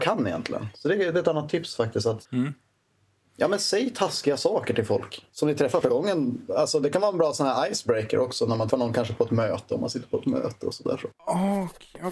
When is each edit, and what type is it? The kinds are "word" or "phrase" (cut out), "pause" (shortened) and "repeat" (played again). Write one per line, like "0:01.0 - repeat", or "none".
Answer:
0:02.2 - pause
0:05.3 - pause
0:05.8 - word
0:08.7 - word